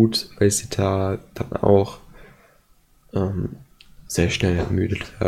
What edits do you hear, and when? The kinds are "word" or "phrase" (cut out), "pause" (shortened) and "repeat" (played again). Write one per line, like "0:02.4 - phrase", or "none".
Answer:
none